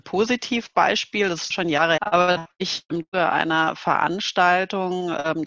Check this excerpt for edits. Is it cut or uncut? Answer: cut